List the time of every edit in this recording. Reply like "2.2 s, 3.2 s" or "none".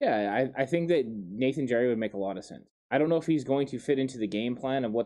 none